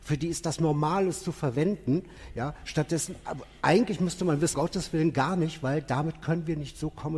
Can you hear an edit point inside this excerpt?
yes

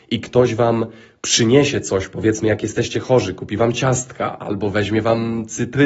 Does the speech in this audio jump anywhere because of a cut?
no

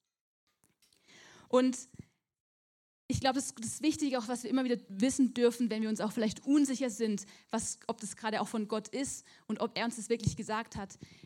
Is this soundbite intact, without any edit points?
yes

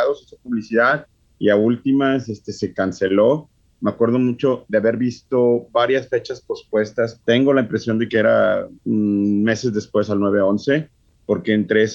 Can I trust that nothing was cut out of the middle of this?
no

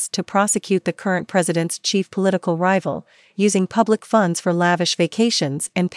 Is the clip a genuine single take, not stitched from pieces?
yes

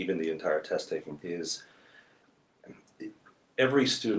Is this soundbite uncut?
no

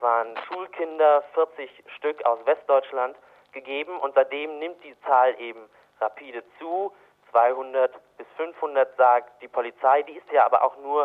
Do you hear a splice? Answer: no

